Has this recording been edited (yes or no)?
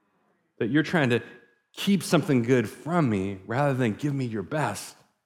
no